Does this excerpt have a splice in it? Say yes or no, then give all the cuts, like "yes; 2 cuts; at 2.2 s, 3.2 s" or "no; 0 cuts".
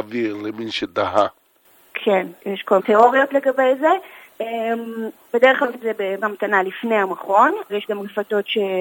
yes; 5 cuts; at 2.4 s, 2.8 s, 5.7 s, 6.2 s, 7.7 s